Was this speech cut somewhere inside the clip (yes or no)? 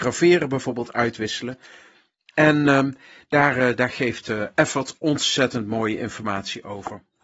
no